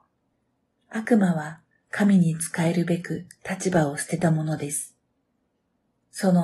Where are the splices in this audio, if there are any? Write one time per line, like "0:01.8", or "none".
none